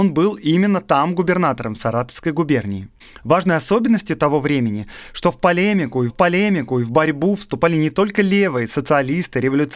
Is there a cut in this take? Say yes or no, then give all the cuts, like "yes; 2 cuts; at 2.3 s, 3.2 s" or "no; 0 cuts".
yes; 2 cuts; at 3.0 s, 6.1 s